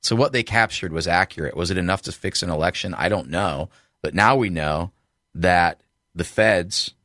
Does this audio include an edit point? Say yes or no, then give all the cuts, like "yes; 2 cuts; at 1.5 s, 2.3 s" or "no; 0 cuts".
no; 0 cuts